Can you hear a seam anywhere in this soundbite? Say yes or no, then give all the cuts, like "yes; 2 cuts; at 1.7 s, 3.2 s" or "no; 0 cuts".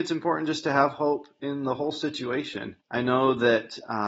yes; 1 cut; at 2.8 s